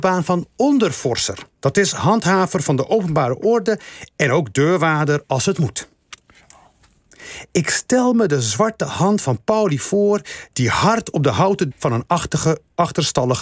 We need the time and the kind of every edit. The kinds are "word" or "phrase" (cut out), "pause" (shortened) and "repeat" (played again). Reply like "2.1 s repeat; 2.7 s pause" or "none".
1.5 s pause; 11.7 s word